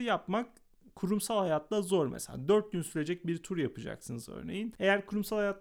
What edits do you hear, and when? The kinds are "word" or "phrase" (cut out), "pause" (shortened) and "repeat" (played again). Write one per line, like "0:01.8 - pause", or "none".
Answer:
none